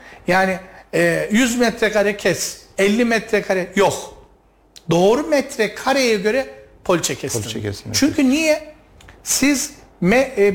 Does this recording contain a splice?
no; 0 cuts

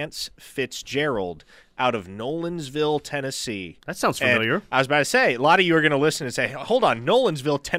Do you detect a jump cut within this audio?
no; 0 cuts

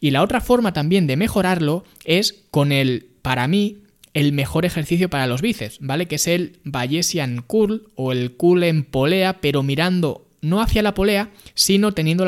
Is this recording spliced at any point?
no; 0 cuts

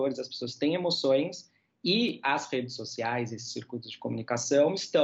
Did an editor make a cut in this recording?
no; 0 cuts

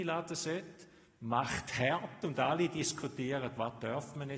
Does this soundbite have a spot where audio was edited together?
no; 0 cuts

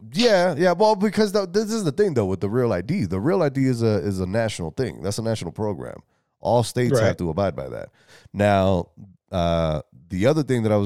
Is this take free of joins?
yes; 0 cuts

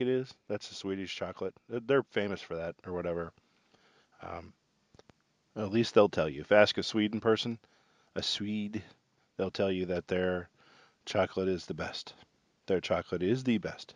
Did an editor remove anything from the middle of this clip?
no; 0 cuts

